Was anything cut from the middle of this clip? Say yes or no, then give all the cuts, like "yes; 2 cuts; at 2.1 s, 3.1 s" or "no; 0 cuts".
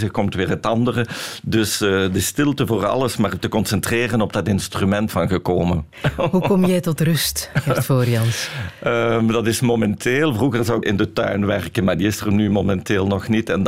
yes; 2 cuts; at 5.1 s, 10.8 s